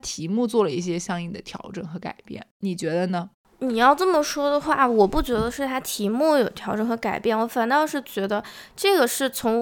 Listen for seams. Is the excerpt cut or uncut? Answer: uncut